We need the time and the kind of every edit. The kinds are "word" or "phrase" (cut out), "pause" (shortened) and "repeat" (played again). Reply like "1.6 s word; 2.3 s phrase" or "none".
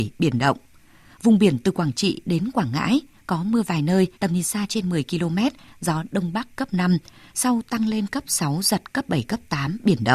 4.1 s pause